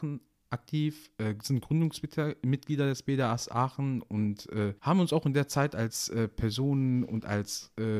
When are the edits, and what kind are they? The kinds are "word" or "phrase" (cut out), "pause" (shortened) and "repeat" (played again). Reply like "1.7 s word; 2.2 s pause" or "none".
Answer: 4.8 s pause